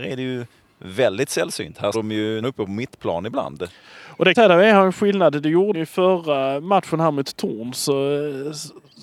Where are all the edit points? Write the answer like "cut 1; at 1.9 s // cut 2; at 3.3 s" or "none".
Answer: cut 1; at 1.9 s // cut 2; at 2.4 s // cut 3; at 4.3 s // cut 4; at 5.7 s